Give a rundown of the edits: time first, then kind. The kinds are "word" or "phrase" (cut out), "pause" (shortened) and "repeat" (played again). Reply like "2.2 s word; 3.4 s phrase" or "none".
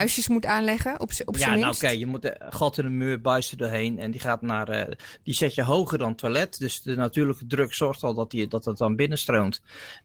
none